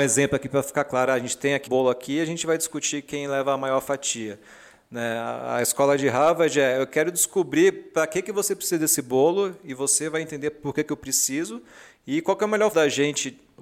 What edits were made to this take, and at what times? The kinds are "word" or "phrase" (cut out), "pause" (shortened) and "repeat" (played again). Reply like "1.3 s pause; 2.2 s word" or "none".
1.7 s word; 12.7 s word